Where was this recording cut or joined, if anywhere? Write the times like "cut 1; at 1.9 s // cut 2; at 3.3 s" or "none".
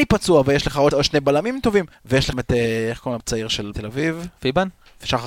cut 1; at 0.9 s // cut 2; at 1.9 s // cut 3; at 2.3 s // cut 4; at 3.2 s // cut 5; at 3.7 s